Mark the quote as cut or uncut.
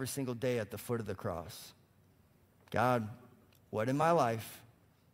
uncut